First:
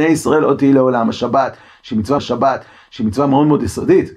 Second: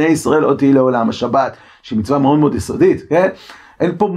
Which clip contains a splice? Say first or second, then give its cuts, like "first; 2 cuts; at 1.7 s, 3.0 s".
first; 1 cut; at 2.2 s